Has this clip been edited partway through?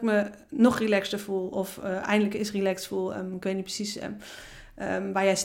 no; 0 cuts

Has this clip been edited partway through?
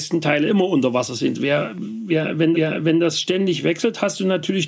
yes; 1 cut; at 2.5 s

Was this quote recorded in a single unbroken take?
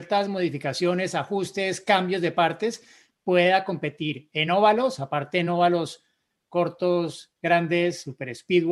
yes; 0 cuts

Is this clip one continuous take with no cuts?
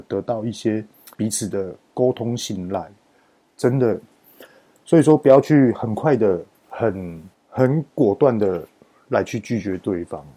no; 2 cuts; at 1.1 s, 6.6 s

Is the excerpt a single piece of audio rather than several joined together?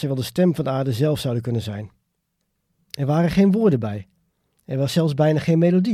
yes; 0 cuts

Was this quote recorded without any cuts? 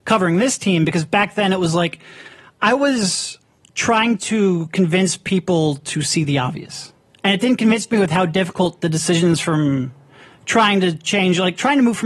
yes; 0 cuts

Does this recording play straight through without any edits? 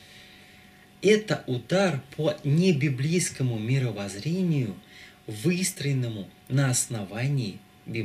yes; 0 cuts

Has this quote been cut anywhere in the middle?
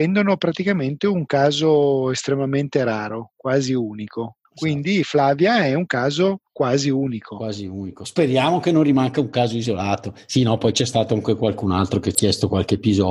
yes; 2 cuts; at 4.4 s, 6.5 s

